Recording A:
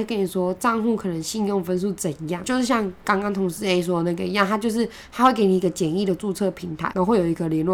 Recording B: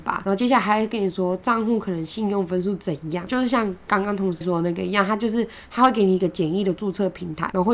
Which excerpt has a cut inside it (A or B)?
B